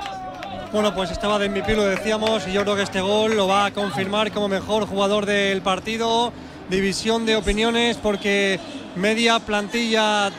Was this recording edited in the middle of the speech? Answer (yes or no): no